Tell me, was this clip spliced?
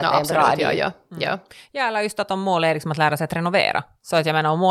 no; 0 cuts

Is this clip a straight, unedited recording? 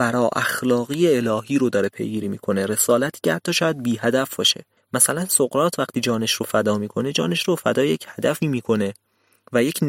yes; 0 cuts

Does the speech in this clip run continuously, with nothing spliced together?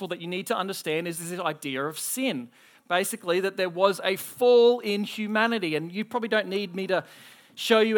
yes; 0 cuts

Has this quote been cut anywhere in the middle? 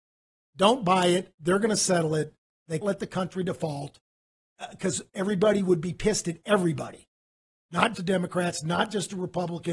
yes; 2 cuts; at 2.8 s, 7.9 s

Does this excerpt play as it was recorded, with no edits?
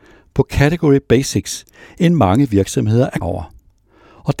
no; 1 cut; at 3.2 s

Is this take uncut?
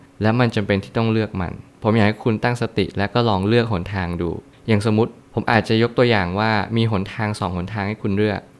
yes; 0 cuts

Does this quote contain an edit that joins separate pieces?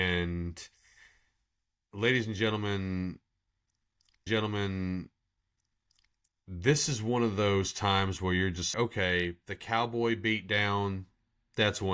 yes; 2 cuts; at 4.3 s, 8.7 s

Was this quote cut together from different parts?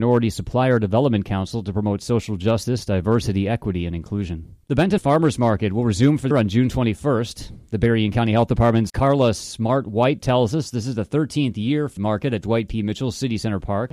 yes; 5 cuts; at 4.6 s, 5.0 s, 6.3 s, 8.9 s, 12.0 s

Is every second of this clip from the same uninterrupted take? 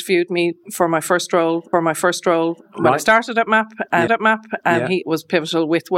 no; 3 cuts; at 1.7 s, 4.1 s, 5.0 s

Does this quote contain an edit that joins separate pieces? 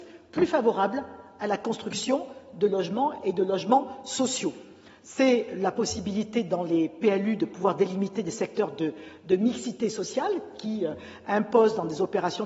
no; 0 cuts

